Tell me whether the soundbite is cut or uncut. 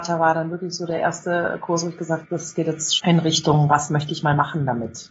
cut